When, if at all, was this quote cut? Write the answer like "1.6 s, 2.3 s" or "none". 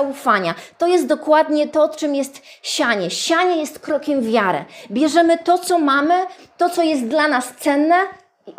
none